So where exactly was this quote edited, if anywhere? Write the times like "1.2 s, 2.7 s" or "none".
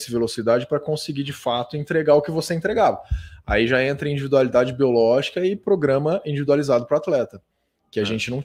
none